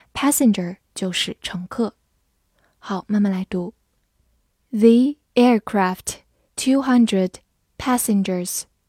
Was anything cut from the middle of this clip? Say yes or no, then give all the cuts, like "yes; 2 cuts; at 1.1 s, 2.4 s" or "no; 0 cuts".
yes; 1 cut; at 6.5 s